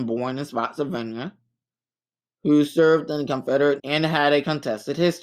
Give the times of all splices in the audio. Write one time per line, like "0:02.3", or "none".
0:03.8